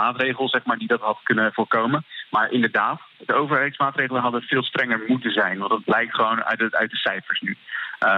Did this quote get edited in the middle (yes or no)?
no